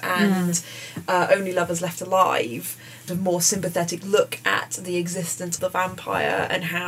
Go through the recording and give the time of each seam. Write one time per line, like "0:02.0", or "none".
0:03.1
0:05.6